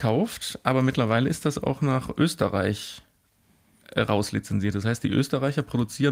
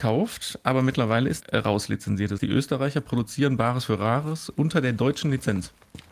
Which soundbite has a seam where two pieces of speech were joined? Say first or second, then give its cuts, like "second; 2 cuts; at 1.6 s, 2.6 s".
second; 2 cuts; at 1.4 s, 2.4 s